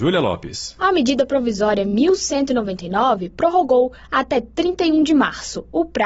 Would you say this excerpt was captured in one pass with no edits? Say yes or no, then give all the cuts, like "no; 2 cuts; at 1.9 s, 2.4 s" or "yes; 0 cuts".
yes; 0 cuts